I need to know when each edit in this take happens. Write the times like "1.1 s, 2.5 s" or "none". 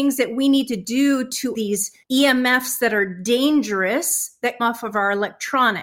1.5 s, 2.0 s, 4.6 s